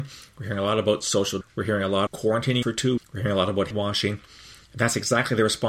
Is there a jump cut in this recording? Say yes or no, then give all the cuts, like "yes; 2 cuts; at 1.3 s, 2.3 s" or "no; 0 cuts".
yes; 5 cuts; at 1.4 s, 2.1 s, 2.6 s, 3.0 s, 3.7 s